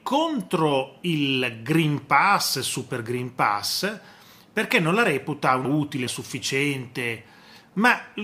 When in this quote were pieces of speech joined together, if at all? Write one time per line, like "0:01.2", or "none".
0:05.6
0:06.1